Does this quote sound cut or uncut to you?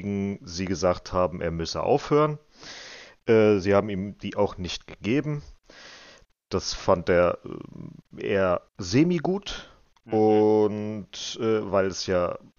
cut